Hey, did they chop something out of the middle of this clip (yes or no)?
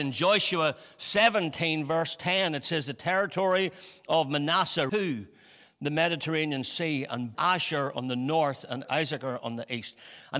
yes